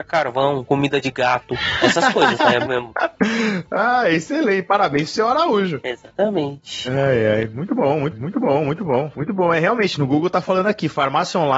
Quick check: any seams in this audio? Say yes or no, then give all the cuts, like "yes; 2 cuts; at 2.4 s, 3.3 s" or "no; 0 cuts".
yes; 2 cuts; at 2.7 s, 8.1 s